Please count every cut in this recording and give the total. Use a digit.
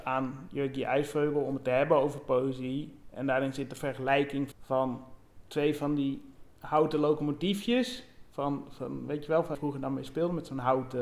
2